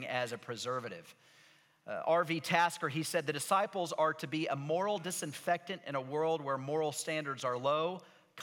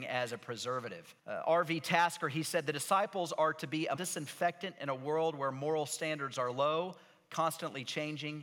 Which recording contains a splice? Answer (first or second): second